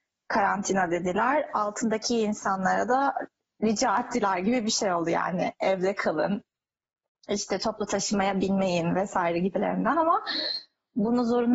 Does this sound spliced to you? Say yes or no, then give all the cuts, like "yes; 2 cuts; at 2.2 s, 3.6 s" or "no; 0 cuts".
no; 0 cuts